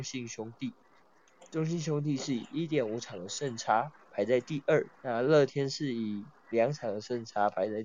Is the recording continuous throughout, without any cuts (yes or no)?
no